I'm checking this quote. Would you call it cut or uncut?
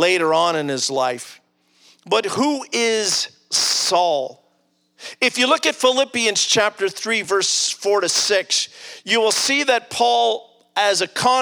uncut